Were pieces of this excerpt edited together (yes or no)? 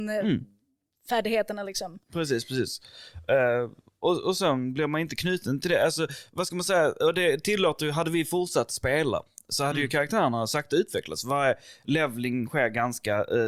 no